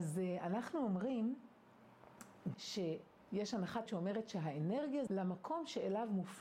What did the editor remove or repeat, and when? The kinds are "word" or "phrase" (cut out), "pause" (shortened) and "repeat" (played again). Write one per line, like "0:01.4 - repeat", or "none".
0:02.5 - word
0:03.9 - word
0:05.1 - word